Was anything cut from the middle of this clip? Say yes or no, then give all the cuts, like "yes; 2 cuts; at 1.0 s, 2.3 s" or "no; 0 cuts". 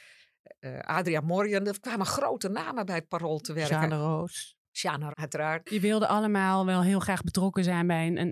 yes; 1 cut; at 5.1 s